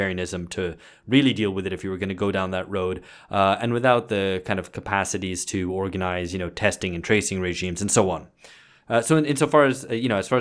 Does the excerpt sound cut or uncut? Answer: uncut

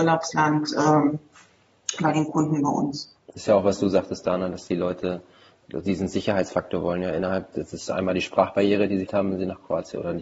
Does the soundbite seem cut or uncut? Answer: cut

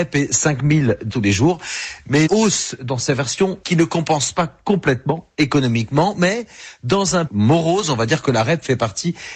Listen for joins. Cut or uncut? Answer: cut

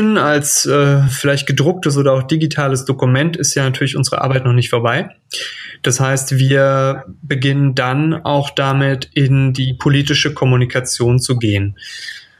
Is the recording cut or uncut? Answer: uncut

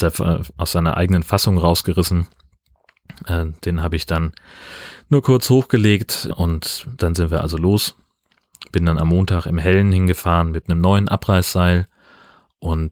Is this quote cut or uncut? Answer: cut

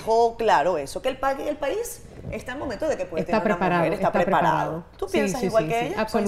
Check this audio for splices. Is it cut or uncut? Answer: uncut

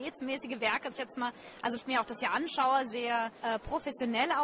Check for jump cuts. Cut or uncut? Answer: cut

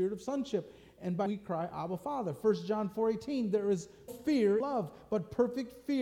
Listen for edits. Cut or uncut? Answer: cut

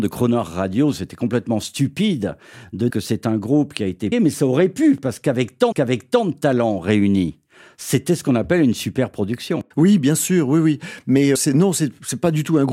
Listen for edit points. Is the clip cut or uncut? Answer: cut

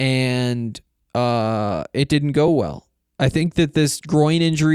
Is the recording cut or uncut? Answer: uncut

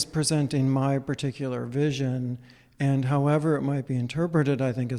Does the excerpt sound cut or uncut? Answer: uncut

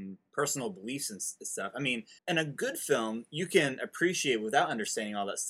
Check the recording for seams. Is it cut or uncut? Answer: cut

